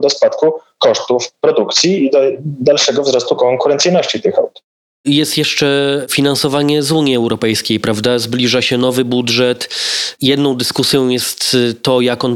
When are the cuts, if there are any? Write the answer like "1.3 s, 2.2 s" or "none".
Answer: none